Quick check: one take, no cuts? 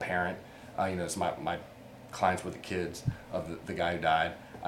yes; 0 cuts

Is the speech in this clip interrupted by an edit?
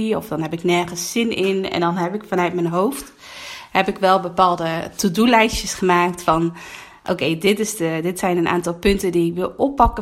no; 0 cuts

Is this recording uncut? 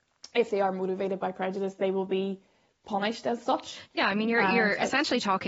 yes; 0 cuts

